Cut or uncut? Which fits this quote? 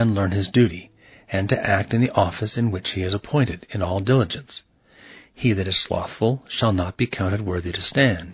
uncut